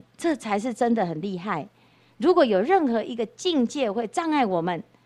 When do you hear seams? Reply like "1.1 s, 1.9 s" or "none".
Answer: none